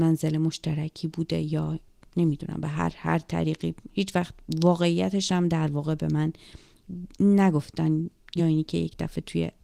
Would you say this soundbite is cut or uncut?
uncut